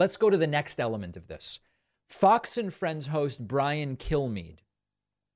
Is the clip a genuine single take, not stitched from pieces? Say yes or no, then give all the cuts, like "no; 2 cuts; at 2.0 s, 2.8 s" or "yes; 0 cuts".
yes; 0 cuts